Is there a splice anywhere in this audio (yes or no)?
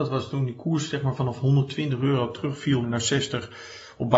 yes